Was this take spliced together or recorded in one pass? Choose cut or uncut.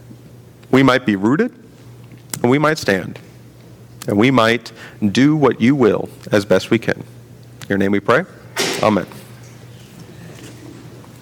uncut